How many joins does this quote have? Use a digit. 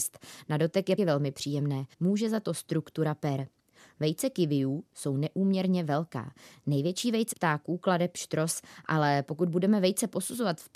3